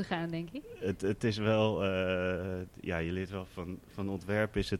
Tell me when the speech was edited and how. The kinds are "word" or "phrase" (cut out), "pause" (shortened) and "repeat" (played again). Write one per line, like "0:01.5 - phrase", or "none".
none